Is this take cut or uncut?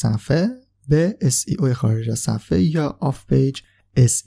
uncut